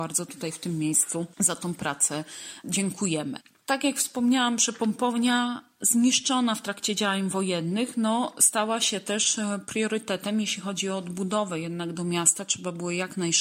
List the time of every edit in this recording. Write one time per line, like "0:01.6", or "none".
none